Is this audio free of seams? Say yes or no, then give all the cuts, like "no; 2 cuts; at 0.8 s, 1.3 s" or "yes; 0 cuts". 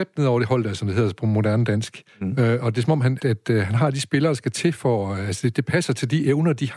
no; 1 cut; at 3.2 s